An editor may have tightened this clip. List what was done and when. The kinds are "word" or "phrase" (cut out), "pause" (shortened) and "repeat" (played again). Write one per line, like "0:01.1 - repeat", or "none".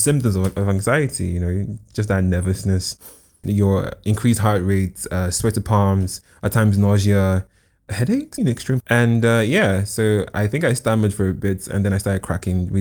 0:08.4 - word
0:08.8 - word